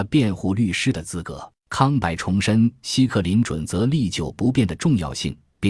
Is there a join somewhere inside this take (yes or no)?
yes